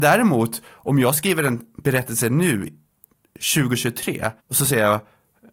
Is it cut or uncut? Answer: cut